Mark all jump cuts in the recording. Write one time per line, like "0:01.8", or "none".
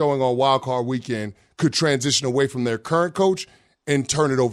none